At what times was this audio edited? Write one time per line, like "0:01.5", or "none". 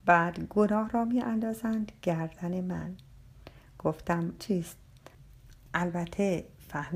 0:04.4

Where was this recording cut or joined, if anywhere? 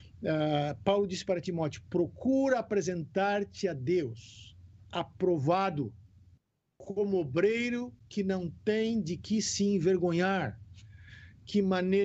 none

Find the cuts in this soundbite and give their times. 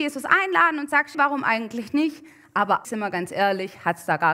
0:01.1
0:02.8

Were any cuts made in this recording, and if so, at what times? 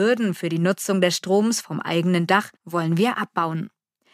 0:02.6

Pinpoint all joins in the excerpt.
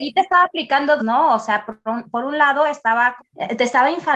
0:01.0
0:03.2

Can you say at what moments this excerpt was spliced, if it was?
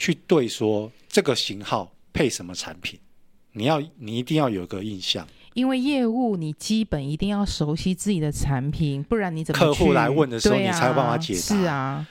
none

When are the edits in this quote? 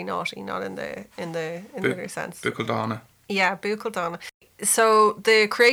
none

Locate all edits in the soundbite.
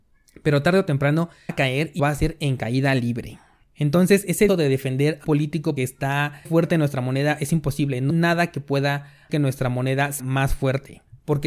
0:01.5
0:02.0
0:04.5
0:05.2
0:05.8
0:06.4
0:08.1
0:09.3
0:10.2

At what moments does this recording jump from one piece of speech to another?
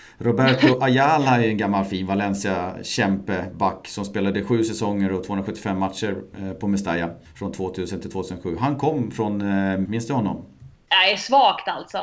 0:09.8

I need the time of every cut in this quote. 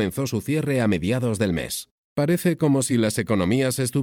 none

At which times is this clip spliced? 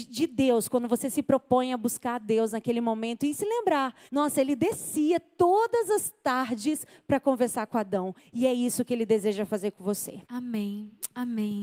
0:04.1
0:10.2

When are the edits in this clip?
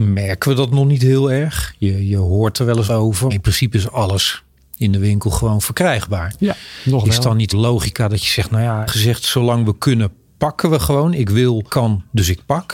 0:02.9
0:03.3
0:07.5
0:08.9
0:10.3
0:11.7

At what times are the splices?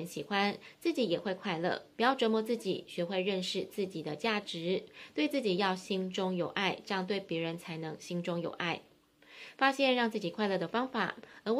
0:01.9

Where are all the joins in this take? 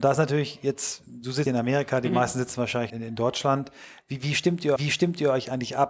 0:01.5
0:02.9
0:04.8

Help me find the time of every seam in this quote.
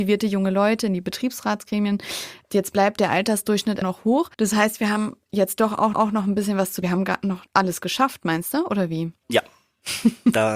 0:03.8
0:04.3
0:05.9
0:06.8
0:07.5

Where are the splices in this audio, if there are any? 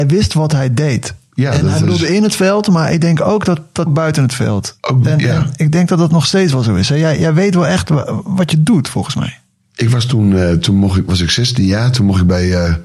0:03.9

